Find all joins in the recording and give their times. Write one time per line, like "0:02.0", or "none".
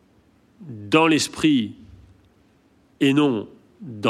none